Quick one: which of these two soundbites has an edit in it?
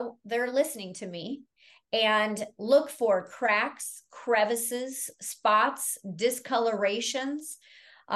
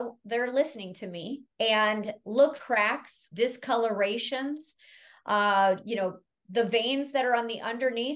second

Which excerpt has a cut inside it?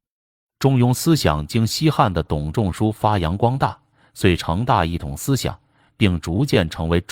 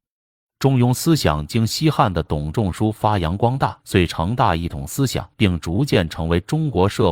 second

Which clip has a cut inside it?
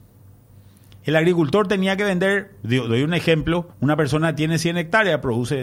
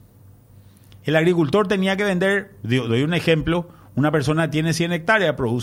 first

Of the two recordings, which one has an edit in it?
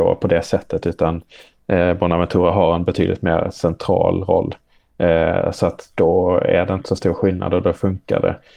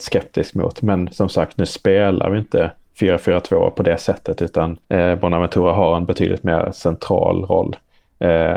second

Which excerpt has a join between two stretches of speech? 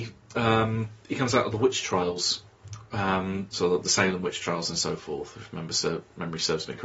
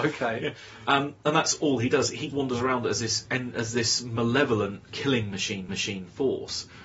second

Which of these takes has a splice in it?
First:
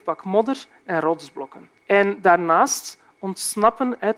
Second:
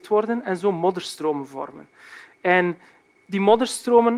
first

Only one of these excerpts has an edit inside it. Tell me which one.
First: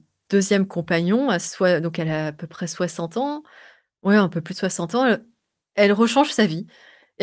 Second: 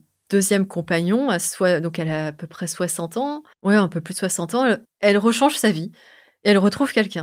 second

